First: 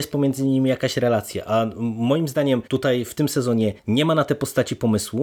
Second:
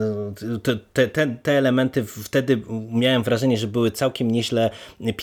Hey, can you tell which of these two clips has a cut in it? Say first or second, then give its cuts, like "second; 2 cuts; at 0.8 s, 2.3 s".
first; 2 cuts; at 2.7 s, 3.8 s